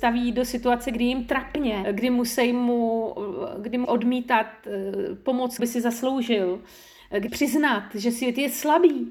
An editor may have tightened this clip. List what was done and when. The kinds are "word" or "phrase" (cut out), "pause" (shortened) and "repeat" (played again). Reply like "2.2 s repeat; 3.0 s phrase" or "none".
1.8 s word; 3.8 s word; 5.6 s word; 7.3 s word